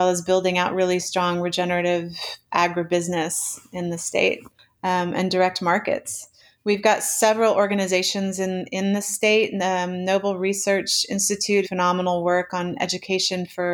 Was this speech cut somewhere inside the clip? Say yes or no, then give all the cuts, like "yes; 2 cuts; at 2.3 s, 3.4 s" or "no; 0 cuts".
yes; 1 cut; at 11.6 s